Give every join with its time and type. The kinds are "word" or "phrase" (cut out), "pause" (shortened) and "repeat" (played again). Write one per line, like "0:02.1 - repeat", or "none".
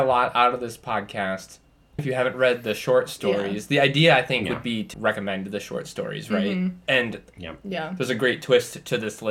0:02.0 - word
0:04.9 - word